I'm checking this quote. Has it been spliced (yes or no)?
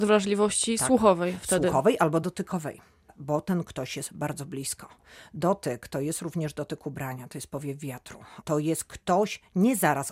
no